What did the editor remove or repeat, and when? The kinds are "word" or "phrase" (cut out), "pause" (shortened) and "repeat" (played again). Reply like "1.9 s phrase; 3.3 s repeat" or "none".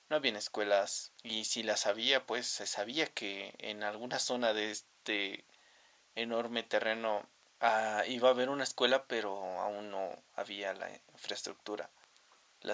none